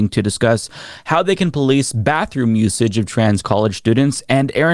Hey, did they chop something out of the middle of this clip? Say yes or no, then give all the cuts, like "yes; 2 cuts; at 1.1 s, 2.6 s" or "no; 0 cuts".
no; 0 cuts